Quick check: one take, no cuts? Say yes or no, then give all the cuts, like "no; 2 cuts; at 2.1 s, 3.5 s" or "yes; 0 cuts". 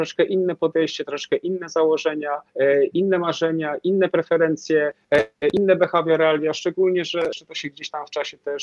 no; 2 cuts; at 2.5 s, 7.4 s